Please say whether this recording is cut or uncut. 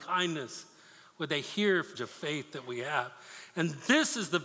cut